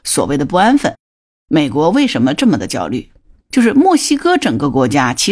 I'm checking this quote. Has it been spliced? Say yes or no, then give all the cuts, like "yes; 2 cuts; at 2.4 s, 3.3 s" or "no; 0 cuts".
no; 0 cuts